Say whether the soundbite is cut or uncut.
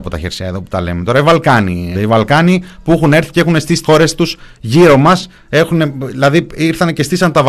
cut